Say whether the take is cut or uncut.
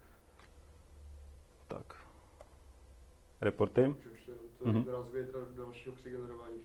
uncut